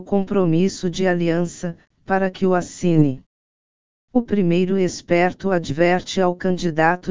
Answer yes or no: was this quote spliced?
no